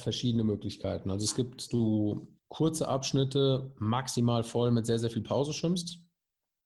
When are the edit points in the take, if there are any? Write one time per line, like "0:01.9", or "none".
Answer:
0:01.7
0:02.4